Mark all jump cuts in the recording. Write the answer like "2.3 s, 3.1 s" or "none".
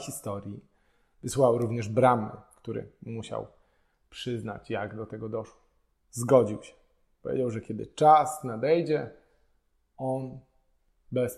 5.9 s